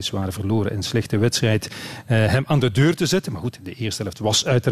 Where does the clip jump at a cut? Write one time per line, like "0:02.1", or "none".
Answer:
none